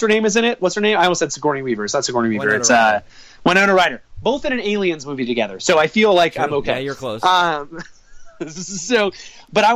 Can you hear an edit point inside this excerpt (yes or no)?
no